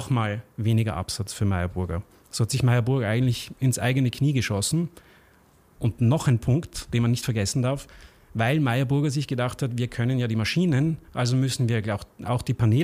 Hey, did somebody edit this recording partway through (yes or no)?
no